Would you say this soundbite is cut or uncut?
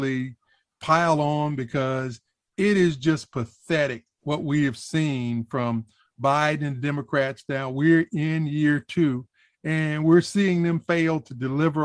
uncut